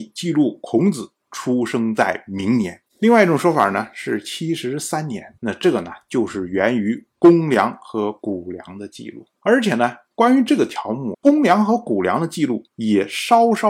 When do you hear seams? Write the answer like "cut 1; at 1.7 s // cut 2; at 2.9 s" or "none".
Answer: cut 1; at 2.9 s // cut 2; at 5.4 s // cut 3; at 9.4 s // cut 4; at 11.1 s // cut 5; at 12.7 s